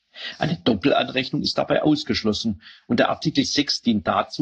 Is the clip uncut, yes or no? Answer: yes